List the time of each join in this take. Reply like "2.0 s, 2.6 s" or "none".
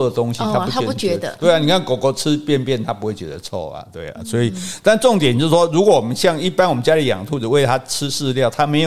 none